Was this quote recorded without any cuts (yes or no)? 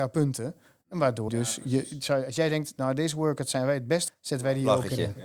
no